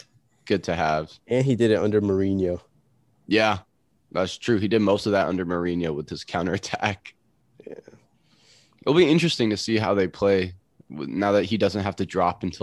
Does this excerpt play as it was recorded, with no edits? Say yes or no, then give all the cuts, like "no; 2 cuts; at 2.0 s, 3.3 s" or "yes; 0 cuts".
yes; 0 cuts